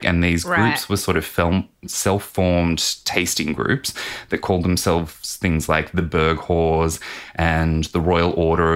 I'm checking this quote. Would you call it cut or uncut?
uncut